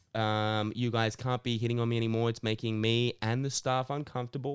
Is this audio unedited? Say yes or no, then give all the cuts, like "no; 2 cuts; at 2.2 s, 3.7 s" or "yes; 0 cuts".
yes; 0 cuts